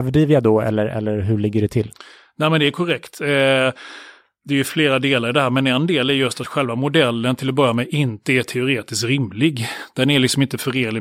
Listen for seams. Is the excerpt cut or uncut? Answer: uncut